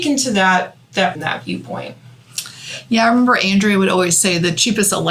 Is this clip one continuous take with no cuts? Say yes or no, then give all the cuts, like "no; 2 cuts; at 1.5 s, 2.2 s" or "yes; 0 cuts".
no; 1 cut; at 1.2 s